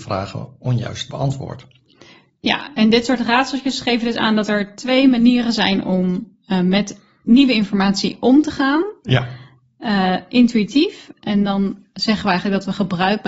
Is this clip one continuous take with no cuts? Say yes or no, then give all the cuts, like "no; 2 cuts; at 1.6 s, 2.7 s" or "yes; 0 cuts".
yes; 0 cuts